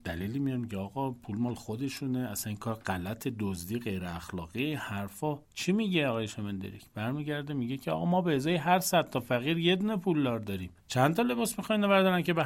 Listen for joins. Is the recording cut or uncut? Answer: cut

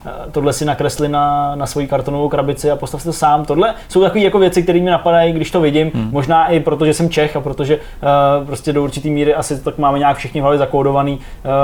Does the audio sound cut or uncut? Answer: uncut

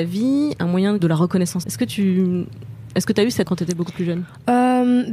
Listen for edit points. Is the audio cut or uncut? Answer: cut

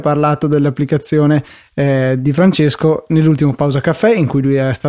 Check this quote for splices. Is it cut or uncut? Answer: uncut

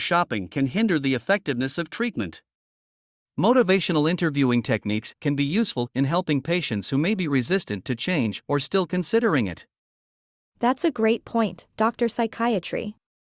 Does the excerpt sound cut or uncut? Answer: uncut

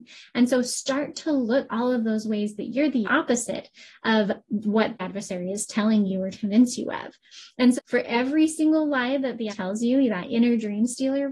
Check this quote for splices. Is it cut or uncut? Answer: cut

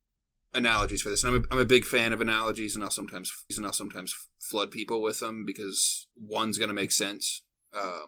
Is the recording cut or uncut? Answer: cut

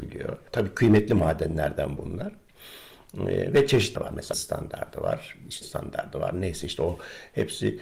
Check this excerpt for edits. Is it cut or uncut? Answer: cut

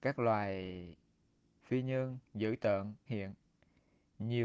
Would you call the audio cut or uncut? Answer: cut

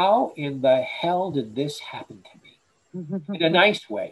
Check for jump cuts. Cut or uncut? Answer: uncut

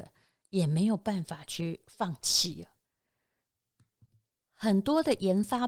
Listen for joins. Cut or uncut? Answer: uncut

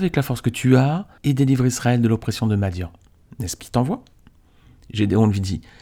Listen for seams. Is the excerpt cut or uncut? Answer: cut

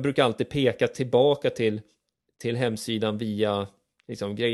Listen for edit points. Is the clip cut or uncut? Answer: uncut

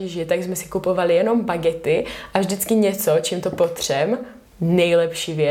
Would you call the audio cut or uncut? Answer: cut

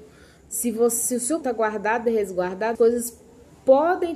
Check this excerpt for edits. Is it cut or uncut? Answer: cut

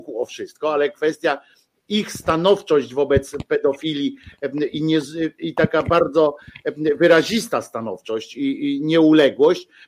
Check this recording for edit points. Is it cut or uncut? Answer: uncut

